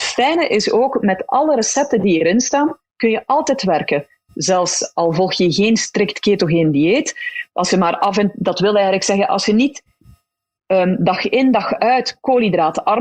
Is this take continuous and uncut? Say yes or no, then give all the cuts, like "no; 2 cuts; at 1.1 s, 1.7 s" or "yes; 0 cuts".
yes; 0 cuts